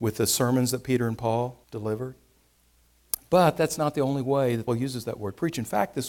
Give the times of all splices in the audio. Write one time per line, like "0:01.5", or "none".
0:01.6
0:04.7